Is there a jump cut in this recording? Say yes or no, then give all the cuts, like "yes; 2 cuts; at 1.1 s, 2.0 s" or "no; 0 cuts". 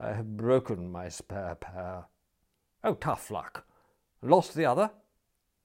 no; 0 cuts